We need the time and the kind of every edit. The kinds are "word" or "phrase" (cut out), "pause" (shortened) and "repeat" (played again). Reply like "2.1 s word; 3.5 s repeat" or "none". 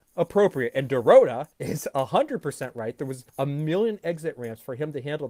1.5 s pause; 3.3 s pause